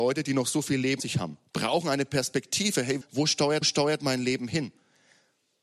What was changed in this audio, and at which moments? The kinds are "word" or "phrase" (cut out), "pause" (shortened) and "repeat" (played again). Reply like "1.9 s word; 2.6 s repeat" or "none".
1.0 s word; 1.5 s pause; 3.0 s word; 3.6 s repeat